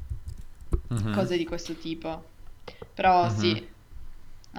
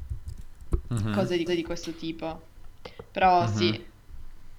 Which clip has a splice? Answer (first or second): second